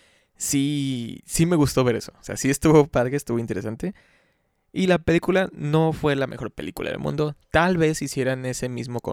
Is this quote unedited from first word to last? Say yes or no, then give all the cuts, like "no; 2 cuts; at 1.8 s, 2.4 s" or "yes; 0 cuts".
yes; 0 cuts